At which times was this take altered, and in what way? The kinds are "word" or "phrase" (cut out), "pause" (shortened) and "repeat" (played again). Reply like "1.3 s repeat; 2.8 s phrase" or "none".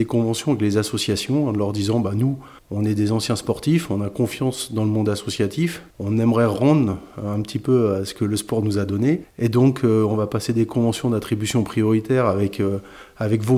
2.6 s pause; 5.9 s pause